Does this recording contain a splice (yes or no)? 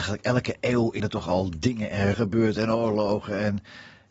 yes